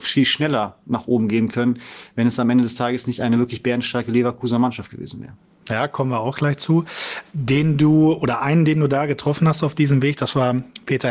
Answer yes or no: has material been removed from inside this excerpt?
no